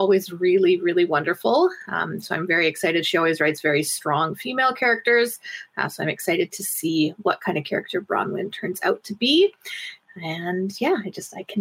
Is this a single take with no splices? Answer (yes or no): yes